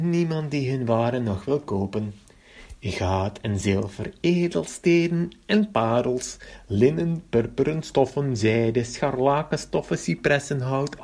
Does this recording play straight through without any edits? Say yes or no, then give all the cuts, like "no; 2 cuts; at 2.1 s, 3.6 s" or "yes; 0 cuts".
yes; 0 cuts